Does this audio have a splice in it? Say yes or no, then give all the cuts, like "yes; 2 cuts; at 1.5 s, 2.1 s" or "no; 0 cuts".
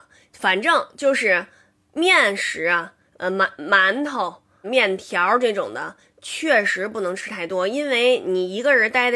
yes; 1 cut; at 4.6 s